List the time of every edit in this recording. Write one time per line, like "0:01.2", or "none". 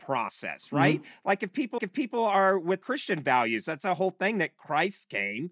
0:01.8
0:02.8